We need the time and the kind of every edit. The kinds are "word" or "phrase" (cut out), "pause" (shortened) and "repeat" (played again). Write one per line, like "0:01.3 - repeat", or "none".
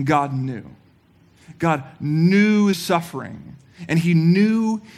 0:02.7 - word